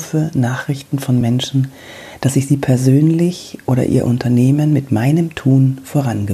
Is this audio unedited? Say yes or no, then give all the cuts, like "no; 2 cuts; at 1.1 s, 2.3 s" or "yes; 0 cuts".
yes; 0 cuts